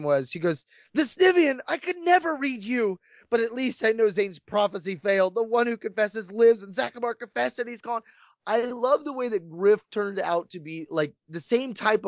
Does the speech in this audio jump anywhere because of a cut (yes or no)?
no